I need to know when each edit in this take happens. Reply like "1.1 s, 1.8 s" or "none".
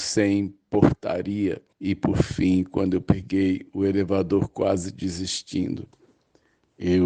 1.7 s